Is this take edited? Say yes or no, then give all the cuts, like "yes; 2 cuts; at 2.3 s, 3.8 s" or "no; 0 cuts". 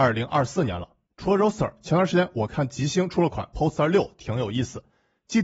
no; 0 cuts